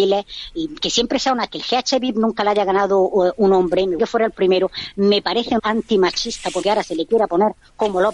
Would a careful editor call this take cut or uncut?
cut